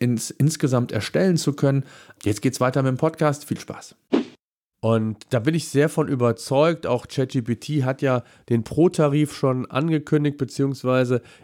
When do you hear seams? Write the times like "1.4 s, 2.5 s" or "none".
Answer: none